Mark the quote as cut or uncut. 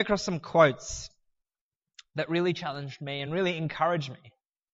uncut